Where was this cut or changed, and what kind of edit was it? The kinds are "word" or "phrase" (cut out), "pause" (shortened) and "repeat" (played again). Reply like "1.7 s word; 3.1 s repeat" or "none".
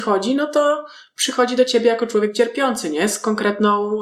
none